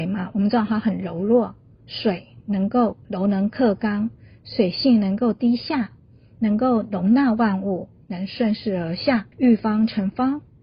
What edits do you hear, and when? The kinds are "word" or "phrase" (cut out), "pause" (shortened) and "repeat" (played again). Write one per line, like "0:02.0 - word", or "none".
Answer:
0:03.0 - pause
0:09.3 - pause